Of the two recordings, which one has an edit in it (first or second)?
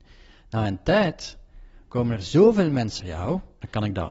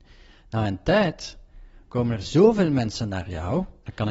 first